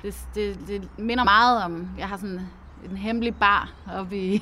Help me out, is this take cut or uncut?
cut